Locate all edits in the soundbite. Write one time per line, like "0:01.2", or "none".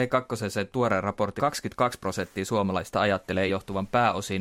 0:01.4
0:03.5

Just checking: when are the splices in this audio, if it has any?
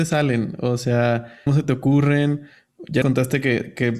0:01.5
0:03.0

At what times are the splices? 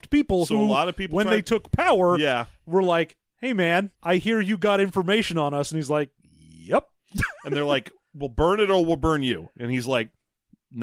0:04.0

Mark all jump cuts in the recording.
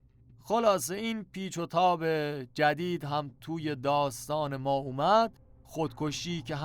none

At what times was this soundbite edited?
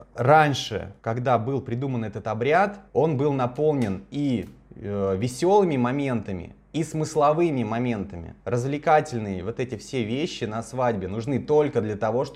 0:01.0
0:02.9
0:08.4

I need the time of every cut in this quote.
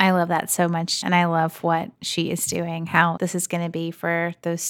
0:01.0
0:01.9
0:03.2

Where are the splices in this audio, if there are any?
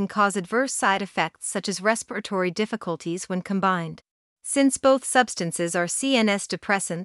0:04.3

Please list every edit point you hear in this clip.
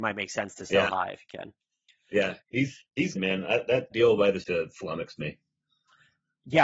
0:02.4
0:03.2
0:03.9
0:04.4

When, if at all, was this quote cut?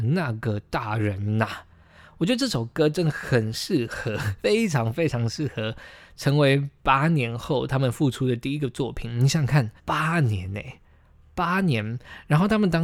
0:04.4
0:09.8

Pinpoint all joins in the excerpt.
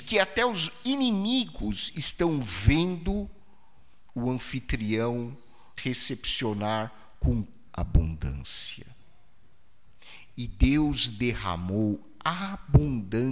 0:05.8
0:07.7

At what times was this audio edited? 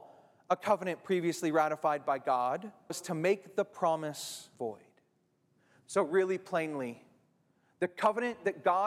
0:02.9
0:04.5

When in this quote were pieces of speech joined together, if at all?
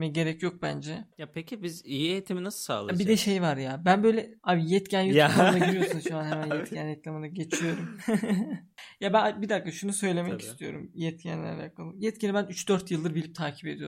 0:01.1
0:04.4

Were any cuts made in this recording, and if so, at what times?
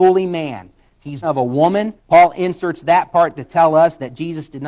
0:01.2
0:02.0
0:03.4

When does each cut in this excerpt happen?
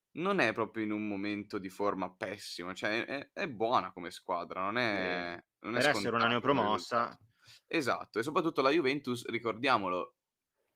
none

